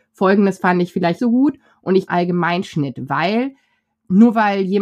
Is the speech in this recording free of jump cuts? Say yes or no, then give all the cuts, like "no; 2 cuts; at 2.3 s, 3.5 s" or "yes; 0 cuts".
no; 2 cuts; at 1.2 s, 2.1 s